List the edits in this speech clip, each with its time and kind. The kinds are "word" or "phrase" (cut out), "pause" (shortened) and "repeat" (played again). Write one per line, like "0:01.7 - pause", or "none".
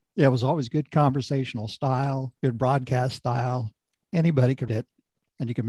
0:02.4 - pause
0:04.7 - word